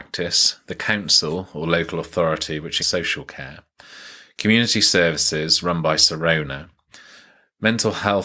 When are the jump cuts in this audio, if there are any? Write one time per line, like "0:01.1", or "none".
0:02.8